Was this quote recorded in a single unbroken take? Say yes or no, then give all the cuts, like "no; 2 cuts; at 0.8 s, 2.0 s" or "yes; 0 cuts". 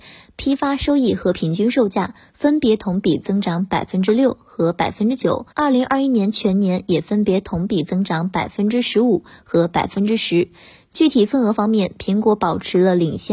no; 1 cut; at 5.5 s